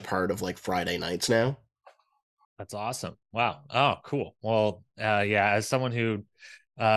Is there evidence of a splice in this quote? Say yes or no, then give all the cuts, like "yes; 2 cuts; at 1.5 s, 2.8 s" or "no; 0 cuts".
no; 0 cuts